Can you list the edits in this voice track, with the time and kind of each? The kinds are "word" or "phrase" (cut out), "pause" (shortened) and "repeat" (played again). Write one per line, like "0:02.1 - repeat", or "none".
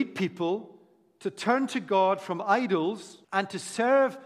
0:03.2 - pause